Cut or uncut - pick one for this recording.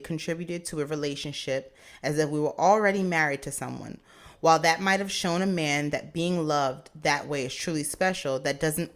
uncut